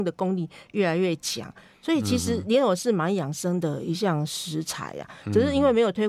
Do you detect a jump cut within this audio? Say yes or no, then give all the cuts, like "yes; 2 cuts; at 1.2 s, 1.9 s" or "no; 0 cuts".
no; 0 cuts